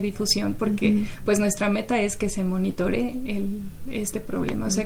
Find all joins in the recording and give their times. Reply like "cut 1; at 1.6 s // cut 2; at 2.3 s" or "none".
none